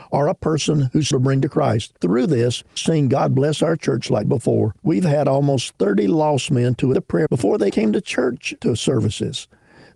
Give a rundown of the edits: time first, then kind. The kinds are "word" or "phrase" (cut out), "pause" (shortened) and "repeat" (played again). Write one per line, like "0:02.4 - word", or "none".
0:01.1 - phrase
0:02.0 - pause
0:02.8 - phrase
0:04.2 - word
0:04.8 - pause
0:06.9 - word
0:07.3 - word
0:07.7 - word